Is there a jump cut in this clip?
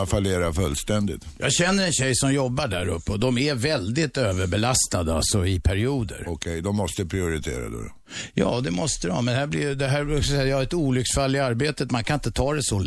no; 0 cuts

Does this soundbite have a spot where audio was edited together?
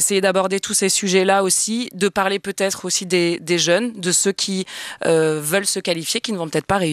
no; 0 cuts

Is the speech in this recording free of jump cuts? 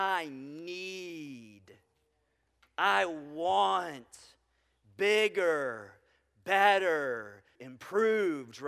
no; 1 cut; at 7.6 s

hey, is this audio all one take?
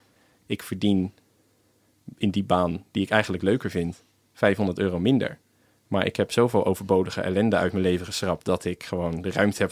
yes; 0 cuts

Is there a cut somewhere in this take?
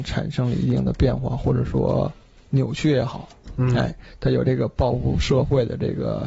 no; 0 cuts

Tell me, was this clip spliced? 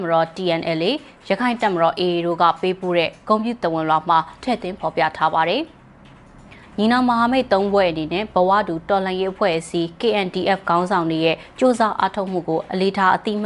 no; 0 cuts

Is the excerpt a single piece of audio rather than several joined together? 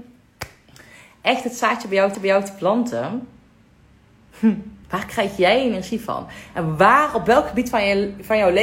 no; 2 cuts; at 2.1 s, 4.8 s

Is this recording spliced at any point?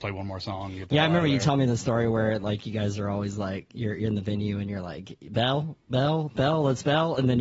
no; 0 cuts

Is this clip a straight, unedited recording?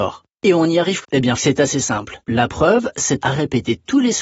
no; 4 cuts; at 1.0 s, 1.4 s, 2.2 s, 3.2 s

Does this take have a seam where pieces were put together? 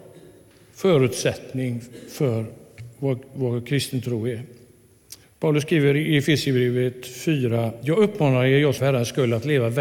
yes; 2 cuts; at 5.2 s, 8.8 s

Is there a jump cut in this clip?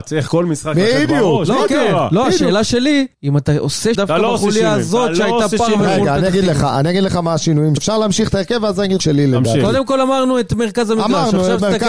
yes; 4 cuts; at 3.1 s, 3.9 s, 7.8 s, 9.0 s

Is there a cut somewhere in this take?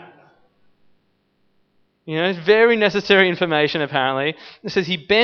no; 0 cuts

